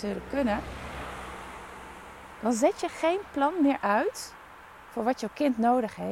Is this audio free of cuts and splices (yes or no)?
yes